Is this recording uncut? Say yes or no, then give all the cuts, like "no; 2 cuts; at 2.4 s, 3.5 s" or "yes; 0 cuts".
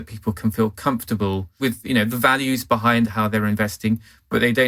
no; 1 cut; at 1.6 s